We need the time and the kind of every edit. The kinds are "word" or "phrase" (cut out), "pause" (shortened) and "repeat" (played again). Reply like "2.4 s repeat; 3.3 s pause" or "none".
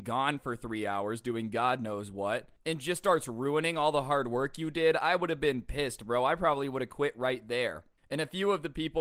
none